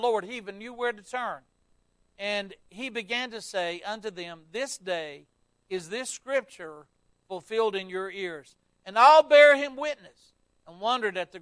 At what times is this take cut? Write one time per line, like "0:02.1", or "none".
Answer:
none